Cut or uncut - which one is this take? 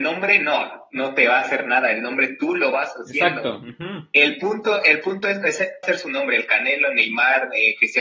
cut